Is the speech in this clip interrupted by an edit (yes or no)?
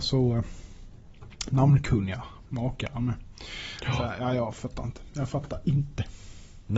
no